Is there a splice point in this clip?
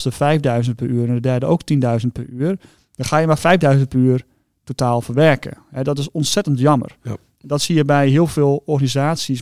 no; 0 cuts

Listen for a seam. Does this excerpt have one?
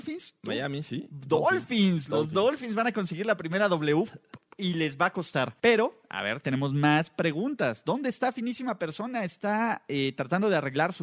yes; 1 cut; at 5.6 s

